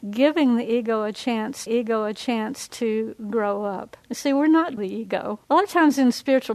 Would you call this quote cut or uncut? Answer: cut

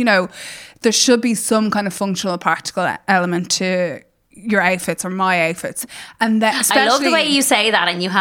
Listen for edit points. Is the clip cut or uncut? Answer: uncut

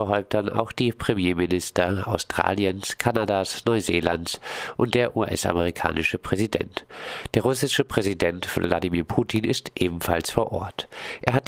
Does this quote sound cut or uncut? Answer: uncut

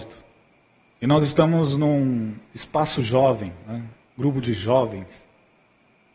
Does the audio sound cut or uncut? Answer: cut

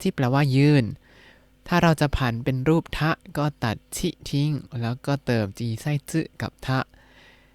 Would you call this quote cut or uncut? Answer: uncut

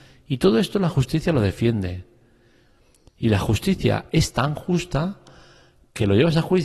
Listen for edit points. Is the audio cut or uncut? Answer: uncut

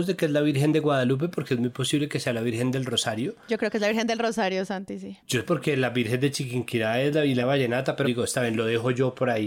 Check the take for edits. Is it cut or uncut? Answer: cut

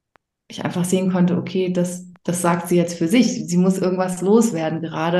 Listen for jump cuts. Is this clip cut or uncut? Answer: uncut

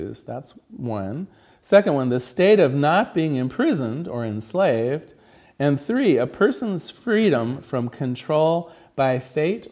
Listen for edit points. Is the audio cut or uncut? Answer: uncut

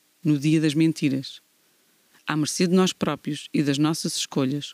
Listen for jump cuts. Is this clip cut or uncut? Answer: uncut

